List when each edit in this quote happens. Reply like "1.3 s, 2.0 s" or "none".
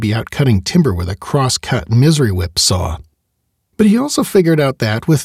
none